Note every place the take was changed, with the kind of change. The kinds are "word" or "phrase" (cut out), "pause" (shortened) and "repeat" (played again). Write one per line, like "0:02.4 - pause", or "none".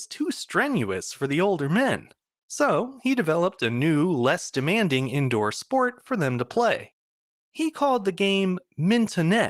none